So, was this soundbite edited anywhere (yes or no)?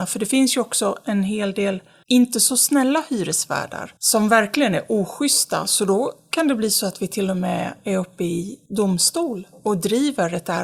yes